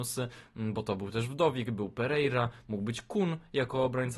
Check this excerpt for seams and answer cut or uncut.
uncut